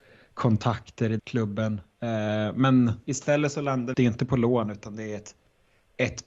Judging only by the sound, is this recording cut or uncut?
cut